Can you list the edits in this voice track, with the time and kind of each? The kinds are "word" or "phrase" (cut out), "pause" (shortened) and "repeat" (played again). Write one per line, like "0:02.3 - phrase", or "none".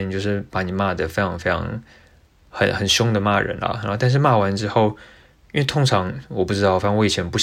none